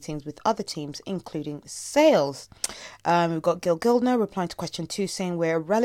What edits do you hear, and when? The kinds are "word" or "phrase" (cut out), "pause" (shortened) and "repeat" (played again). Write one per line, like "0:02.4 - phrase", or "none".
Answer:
none